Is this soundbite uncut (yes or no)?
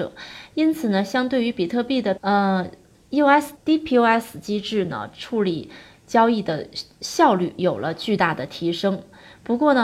no